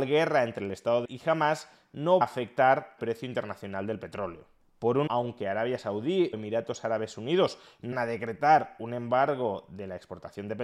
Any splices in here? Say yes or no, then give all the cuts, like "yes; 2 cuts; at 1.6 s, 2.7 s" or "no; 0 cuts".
yes; 6 cuts; at 1.0 s, 2.2 s, 3.0 s, 5.1 s, 6.3 s, 7.9 s